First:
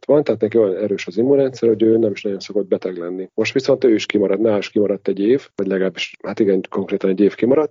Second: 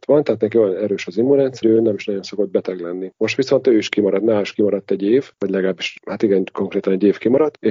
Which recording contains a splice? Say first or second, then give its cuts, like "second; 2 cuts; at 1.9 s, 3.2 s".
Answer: second; 1 cut; at 1.6 s